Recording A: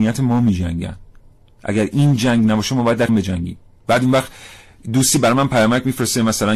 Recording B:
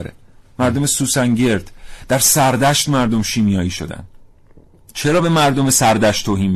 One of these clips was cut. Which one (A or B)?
A